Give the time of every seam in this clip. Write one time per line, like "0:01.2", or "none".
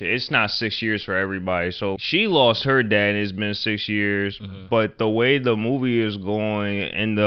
0:02.0